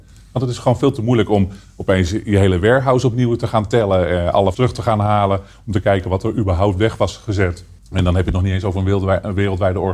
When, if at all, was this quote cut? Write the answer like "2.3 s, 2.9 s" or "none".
4.5 s, 7.8 s